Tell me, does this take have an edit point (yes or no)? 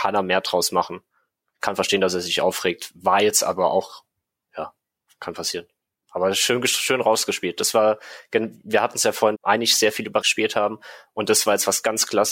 yes